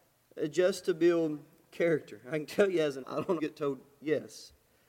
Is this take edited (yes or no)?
yes